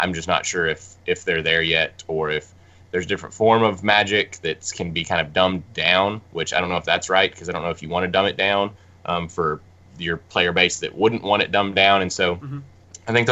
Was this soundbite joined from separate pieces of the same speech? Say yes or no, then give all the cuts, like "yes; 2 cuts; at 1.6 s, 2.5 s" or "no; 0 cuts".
no; 0 cuts